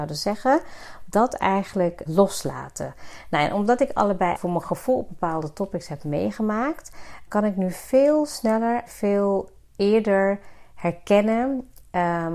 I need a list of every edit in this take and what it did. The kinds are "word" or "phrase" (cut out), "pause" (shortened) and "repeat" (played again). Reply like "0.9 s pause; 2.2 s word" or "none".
2.1 s word; 4.4 s word; 7.3 s word; 8.9 s word